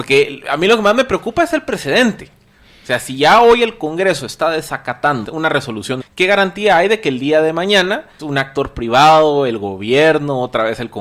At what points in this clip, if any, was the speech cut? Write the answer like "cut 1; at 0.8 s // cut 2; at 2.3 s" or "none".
cut 1; at 5.2 s // cut 2; at 6.0 s // cut 3; at 8.2 s